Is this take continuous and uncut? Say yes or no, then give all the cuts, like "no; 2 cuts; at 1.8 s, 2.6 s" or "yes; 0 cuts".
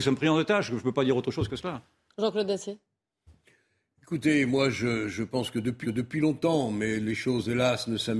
no; 1 cut; at 5.8 s